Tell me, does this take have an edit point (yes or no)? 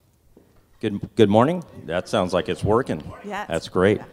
no